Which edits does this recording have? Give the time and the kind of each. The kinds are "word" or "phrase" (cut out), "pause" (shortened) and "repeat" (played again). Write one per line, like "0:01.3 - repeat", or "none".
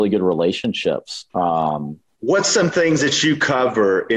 0:01.3 - pause